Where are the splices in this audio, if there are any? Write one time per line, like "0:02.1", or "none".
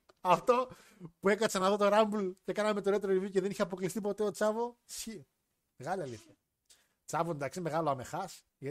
none